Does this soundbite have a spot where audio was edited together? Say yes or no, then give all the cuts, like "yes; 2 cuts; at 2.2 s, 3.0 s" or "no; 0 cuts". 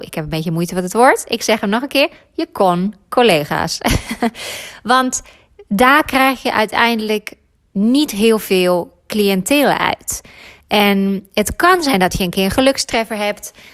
no; 0 cuts